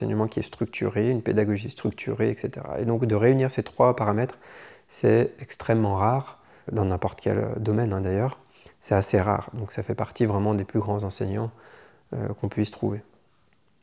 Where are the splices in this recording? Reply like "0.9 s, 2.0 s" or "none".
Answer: 6.7 s

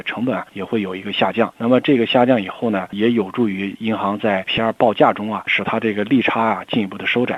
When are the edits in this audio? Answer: 4.4 s

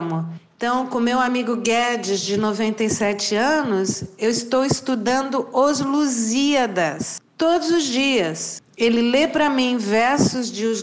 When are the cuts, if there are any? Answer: none

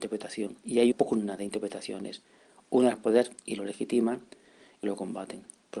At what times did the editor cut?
0.9 s, 2.9 s, 4.8 s

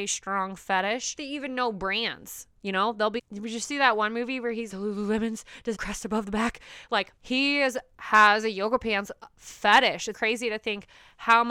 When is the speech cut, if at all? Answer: 3.2 s, 4.7 s, 5.7 s, 7.2 s, 10.1 s

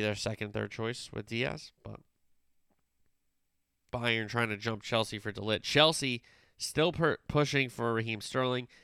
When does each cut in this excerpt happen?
none

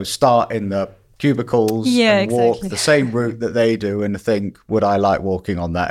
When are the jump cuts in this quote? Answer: none

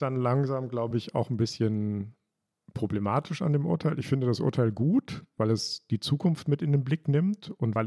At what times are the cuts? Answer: none

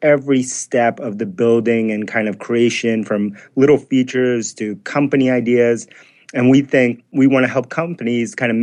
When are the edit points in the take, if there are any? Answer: none

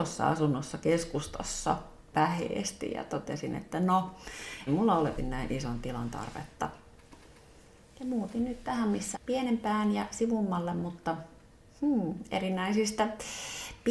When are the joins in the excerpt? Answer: 2.1 s, 4.7 s, 5.2 s, 9.1 s

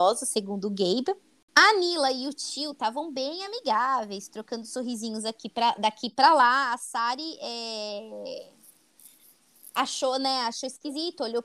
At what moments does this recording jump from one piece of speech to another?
none

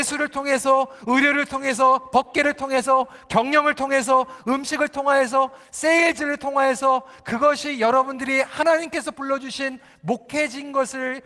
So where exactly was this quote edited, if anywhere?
none

